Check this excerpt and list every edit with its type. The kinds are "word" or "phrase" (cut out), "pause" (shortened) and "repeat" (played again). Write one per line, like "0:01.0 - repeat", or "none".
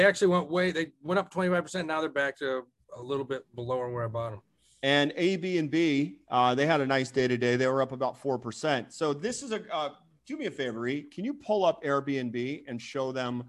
none